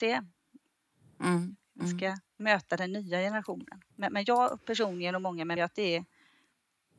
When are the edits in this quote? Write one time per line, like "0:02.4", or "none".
0:02.3
0:03.9
0:05.6